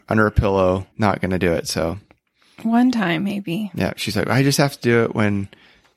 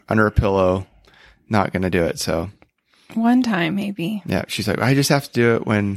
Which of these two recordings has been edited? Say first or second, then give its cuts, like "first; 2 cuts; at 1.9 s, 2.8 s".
first; 1 cut; at 0.9 s